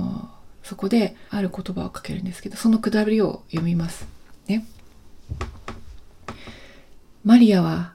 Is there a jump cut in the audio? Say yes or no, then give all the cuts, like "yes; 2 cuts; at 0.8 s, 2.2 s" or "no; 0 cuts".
yes; 1 cut; at 1.3 s